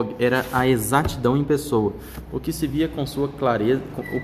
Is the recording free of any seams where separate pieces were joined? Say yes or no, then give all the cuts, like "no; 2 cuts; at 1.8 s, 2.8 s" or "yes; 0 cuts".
yes; 0 cuts